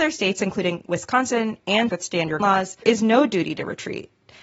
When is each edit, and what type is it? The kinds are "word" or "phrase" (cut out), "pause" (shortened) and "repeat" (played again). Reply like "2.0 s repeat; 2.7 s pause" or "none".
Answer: 1.9 s word; 2.4 s word; 2.8 s word